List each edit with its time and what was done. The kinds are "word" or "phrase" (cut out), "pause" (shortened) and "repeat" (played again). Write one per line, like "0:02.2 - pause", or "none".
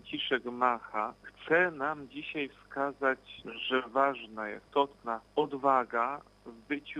none